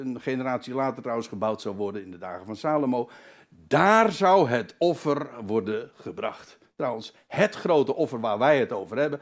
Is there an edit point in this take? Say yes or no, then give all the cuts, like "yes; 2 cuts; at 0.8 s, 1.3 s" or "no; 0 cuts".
no; 0 cuts